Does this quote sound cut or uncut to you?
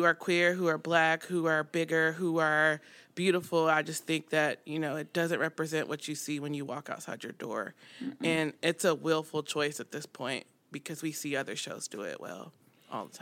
uncut